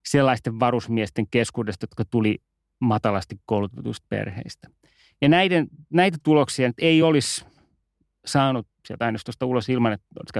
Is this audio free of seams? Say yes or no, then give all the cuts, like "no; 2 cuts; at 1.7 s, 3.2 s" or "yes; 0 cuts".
yes; 0 cuts